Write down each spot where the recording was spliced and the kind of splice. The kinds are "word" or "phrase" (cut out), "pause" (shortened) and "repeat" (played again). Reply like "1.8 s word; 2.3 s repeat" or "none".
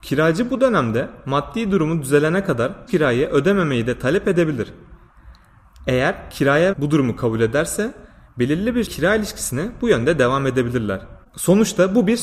2.9 s word; 6.7 s word; 8.9 s word